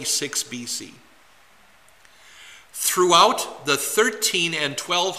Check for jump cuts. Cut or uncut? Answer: uncut